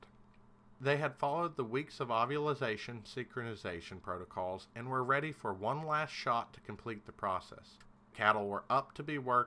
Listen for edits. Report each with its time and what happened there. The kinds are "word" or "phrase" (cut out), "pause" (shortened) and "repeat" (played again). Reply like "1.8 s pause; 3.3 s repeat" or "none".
none